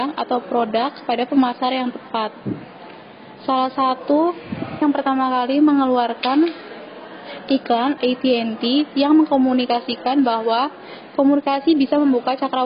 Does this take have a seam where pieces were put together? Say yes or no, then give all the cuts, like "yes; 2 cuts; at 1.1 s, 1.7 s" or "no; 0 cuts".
yes; 2 cuts; at 4.8 s, 8.0 s